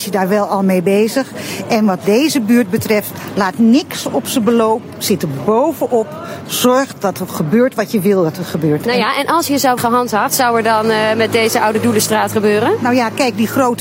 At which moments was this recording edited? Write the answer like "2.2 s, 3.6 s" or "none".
9.8 s, 10.3 s